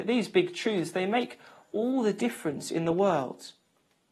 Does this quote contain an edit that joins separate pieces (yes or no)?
no